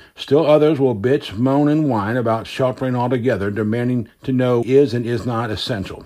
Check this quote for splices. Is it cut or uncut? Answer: cut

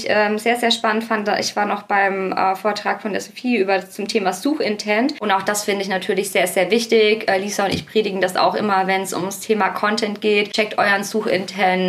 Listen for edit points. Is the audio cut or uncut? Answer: uncut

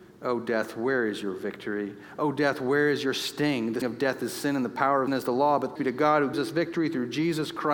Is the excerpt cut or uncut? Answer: cut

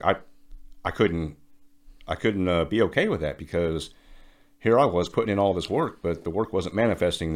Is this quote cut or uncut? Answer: uncut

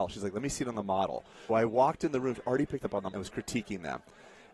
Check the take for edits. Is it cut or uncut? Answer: cut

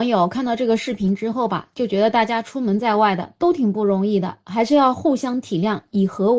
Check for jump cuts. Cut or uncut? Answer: uncut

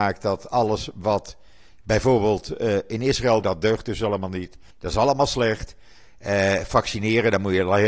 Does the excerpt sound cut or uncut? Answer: cut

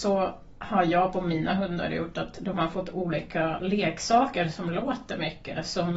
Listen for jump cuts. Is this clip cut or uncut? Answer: uncut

